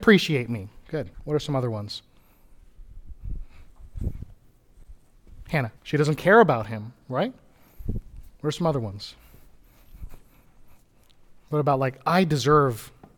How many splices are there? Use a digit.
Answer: 3